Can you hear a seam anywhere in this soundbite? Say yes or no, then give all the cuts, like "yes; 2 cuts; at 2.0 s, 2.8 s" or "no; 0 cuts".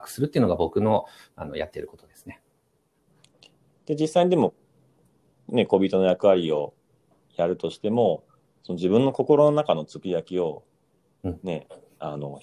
no; 0 cuts